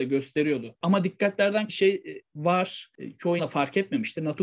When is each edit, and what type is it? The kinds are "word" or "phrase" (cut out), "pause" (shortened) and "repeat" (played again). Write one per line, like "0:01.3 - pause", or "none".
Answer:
0:01.7 - word
0:03.4 - word